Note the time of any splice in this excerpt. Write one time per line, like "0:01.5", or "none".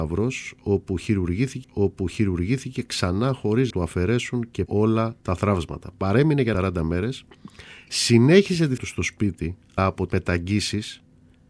0:01.6
0:03.7
0:04.7
0:05.2
0:06.5
0:08.8
0:09.8
0:10.1